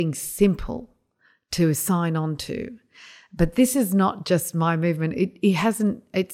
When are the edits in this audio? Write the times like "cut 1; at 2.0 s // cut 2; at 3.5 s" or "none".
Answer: none